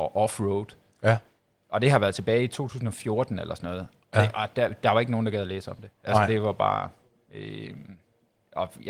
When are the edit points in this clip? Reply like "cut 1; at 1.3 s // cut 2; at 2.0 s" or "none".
none